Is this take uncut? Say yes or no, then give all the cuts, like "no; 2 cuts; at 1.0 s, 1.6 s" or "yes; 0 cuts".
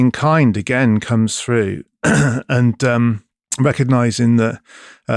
no; 1 cut; at 3.5 s